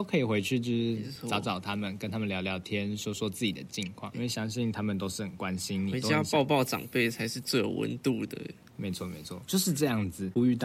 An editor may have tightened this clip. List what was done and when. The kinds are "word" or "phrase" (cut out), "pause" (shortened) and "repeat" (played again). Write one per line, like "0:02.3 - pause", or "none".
0:04.1 - word
0:09.0 - phrase